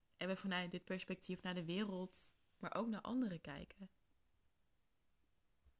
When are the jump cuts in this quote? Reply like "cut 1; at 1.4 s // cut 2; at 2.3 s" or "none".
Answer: none

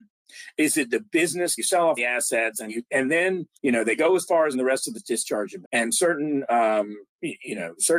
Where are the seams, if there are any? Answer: cut 1; at 1.6 s // cut 2; at 2.0 s // cut 3; at 2.7 s // cut 4; at 3.5 s // cut 5; at 4.5 s // cut 6; at 4.9 s // cut 7; at 5.6 s

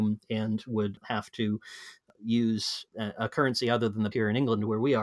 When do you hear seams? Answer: cut 1; at 1.0 s // cut 2; at 2.9 s // cut 3; at 4.1 s

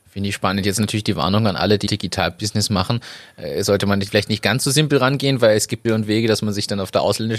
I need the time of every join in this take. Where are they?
cut 1; at 1.9 s // cut 2; at 4.1 s // cut 3; at 5.8 s

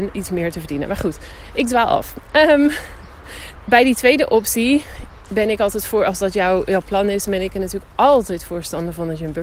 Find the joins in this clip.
cut 1; at 3.6 s

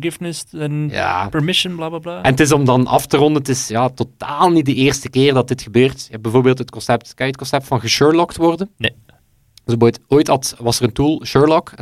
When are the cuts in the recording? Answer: none

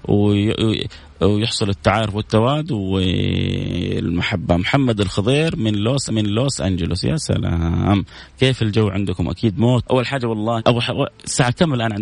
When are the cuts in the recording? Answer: cut 1; at 6.1 s // cut 2; at 9.8 s // cut 3; at 10.6 s

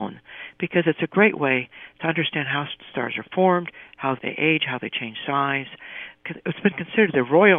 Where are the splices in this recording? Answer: cut 1; at 4.2 s

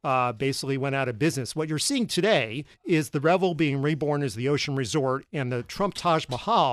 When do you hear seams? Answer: cut 1; at 2.7 s

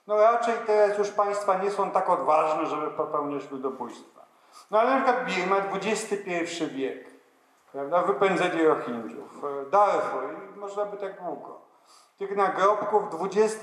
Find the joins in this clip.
none

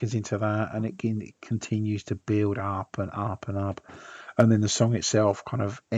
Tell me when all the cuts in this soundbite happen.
none

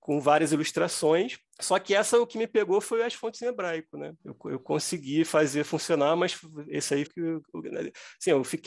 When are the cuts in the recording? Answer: cut 1; at 1.5 s // cut 2; at 4.2 s // cut 3; at 7.1 s

